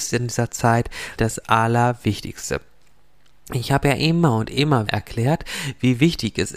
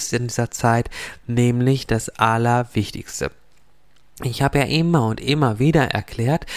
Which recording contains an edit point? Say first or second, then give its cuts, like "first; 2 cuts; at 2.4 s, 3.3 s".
first; 2 cuts; at 1.2 s, 4.9 s